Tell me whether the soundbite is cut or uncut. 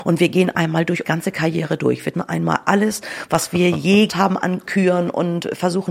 cut